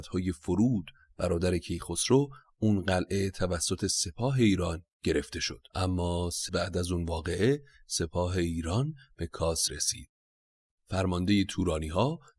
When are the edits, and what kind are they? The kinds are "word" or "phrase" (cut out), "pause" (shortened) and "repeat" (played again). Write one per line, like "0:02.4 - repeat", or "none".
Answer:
0:05.7 - pause
0:06.5 - word
0:09.7 - word